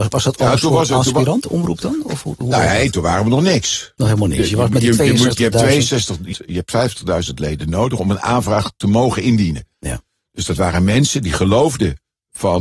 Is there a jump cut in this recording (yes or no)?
yes